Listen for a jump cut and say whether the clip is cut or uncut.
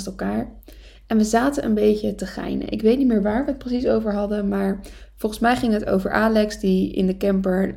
uncut